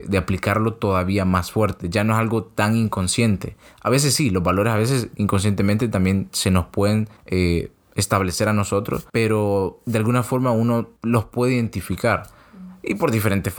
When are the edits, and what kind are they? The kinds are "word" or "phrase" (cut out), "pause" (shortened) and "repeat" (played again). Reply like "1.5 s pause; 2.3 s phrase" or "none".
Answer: 7.2 s pause; 9.1 s pause; 11.0 s pause